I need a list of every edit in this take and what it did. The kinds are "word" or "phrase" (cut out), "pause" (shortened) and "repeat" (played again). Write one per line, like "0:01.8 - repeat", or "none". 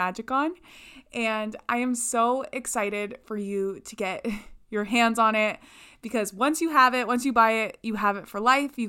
none